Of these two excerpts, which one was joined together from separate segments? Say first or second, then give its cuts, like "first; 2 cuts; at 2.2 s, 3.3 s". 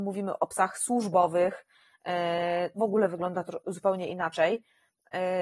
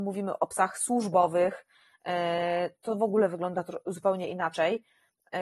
first; 1 cut; at 2.8 s